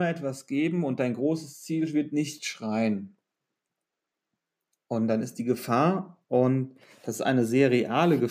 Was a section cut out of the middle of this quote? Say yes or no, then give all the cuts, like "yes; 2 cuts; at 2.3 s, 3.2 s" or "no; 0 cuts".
no; 0 cuts